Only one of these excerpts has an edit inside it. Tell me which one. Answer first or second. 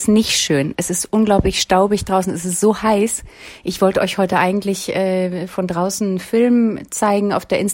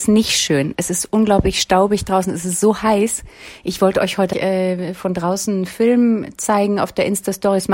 second